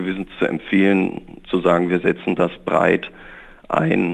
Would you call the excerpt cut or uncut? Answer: uncut